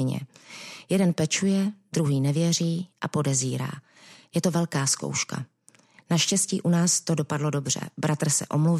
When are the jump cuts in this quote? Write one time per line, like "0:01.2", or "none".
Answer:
none